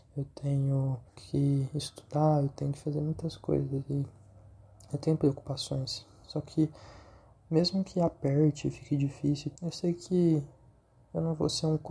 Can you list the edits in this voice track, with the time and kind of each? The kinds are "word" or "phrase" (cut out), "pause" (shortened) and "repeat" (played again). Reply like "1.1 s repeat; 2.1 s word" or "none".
1.1 s pause; 9.6 s word